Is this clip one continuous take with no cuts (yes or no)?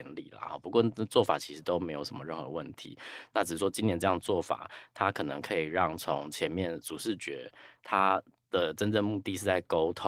yes